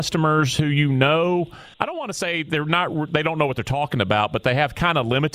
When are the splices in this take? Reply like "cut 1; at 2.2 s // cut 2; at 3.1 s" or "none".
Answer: cut 1; at 1.7 s